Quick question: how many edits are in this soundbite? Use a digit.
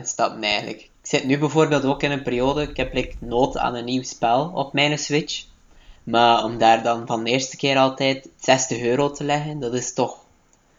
1